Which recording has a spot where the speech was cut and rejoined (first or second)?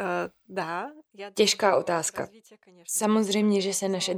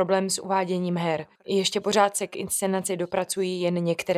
second